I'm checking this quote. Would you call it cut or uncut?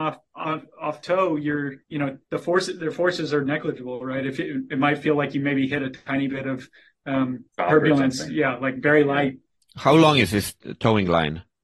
cut